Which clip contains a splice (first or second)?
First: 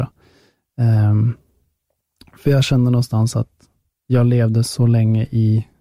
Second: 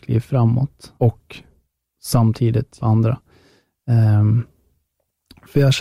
second